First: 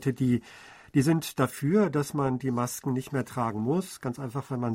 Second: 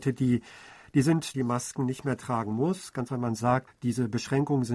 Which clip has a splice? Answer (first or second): second